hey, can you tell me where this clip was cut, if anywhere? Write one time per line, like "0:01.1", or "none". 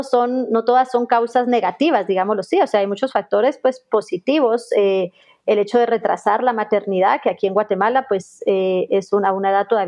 none